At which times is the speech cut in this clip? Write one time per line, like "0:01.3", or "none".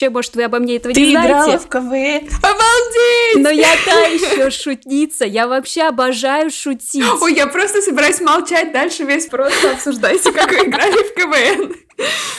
0:09.3